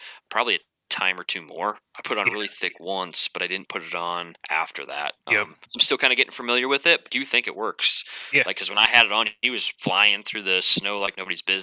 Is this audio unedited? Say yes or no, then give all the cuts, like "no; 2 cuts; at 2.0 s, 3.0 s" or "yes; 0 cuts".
no; 4 cuts; at 4.4 s, 5.2 s, 5.6 s, 7.0 s